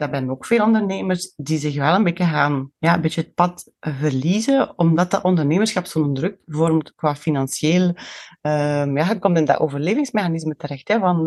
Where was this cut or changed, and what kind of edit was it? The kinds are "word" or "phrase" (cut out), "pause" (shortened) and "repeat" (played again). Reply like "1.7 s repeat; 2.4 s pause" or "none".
2.7 s pause; 3.8 s pause